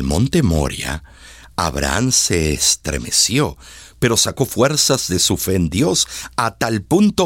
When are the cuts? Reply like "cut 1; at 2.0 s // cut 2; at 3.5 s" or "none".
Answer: none